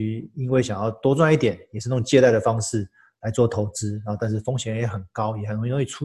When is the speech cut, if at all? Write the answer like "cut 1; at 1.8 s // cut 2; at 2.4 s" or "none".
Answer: none